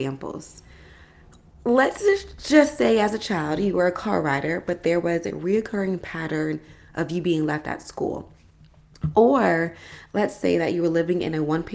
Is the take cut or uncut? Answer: uncut